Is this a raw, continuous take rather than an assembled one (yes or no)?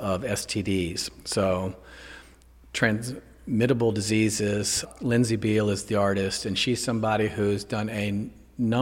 yes